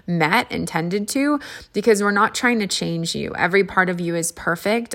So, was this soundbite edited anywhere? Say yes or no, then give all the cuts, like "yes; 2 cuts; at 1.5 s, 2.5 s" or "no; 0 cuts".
no; 0 cuts